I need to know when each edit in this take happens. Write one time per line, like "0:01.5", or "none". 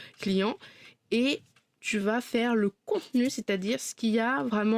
none